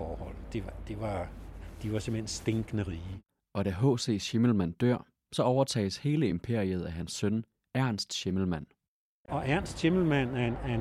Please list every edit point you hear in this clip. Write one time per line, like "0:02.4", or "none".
none